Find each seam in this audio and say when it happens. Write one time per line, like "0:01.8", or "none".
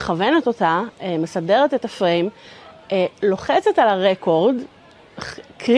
none